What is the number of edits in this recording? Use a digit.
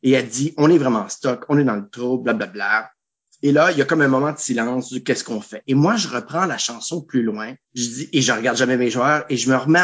1